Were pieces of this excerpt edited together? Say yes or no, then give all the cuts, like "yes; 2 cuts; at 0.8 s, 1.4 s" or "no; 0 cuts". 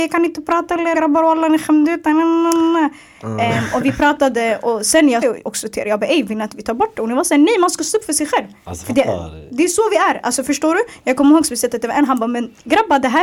yes; 2 cuts; at 0.9 s, 5.2 s